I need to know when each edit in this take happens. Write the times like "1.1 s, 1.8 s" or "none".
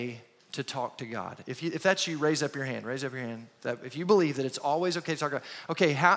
none